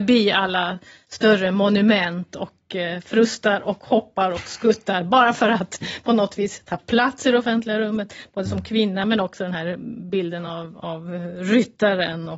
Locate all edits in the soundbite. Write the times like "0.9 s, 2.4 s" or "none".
none